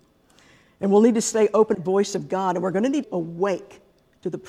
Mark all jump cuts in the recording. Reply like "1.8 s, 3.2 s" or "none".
1.7 s, 3.0 s